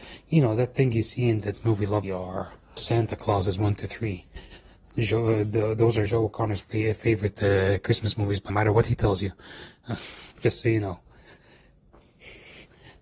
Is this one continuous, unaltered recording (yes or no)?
no